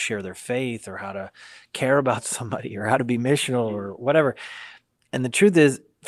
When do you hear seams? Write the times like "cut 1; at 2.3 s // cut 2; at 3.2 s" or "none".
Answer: none